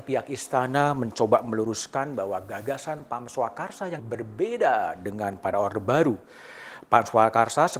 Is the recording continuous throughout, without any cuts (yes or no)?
no